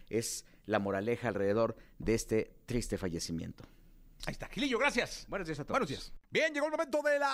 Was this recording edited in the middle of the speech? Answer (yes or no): no